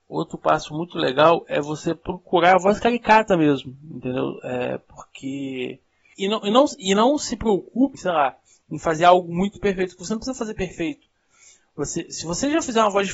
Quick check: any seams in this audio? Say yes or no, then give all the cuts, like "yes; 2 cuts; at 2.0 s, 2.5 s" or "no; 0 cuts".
yes; 2 cuts; at 6.1 s, 7.9 s